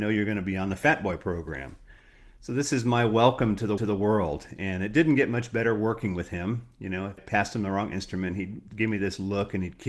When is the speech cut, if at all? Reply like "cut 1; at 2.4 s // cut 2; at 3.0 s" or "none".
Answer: cut 1; at 3.8 s // cut 2; at 7.2 s // cut 3; at 8.7 s

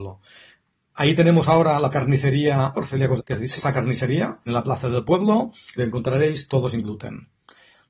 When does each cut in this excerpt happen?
cut 1; at 1.2 s // cut 2; at 1.9 s // cut 3; at 2.7 s // cut 4; at 3.2 s // cut 5; at 3.6 s // cut 6; at 4.5 s // cut 7; at 5.8 s

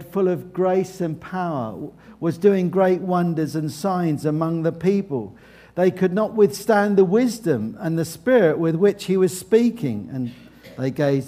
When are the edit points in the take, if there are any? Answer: none

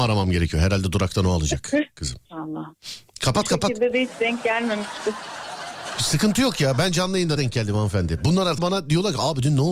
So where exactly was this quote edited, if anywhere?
cut 1; at 2.2 s // cut 2; at 7.4 s // cut 3; at 8.6 s

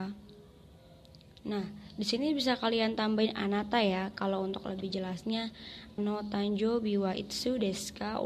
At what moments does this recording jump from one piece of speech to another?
cut 1; at 6.0 s

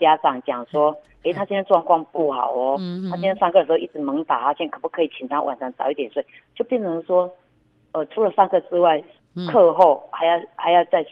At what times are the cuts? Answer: none

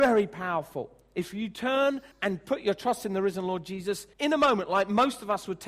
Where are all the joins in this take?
cut 1; at 2.1 s // cut 2; at 4.1 s

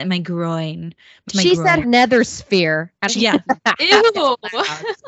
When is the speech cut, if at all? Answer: cut 1; at 1.3 s // cut 2; at 1.8 s // cut 3; at 3.1 s

